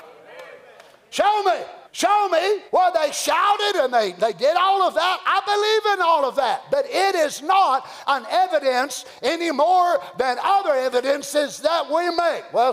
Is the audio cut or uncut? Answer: cut